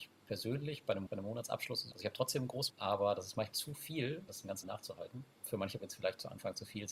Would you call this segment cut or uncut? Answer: cut